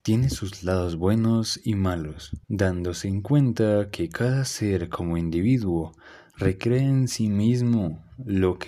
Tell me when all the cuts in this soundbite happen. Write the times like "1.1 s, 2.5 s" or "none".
2.4 s